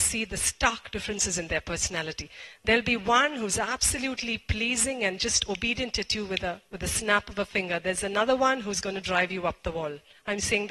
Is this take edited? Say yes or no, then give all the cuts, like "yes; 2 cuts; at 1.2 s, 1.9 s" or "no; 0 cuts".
yes; 1 cut; at 6.7 s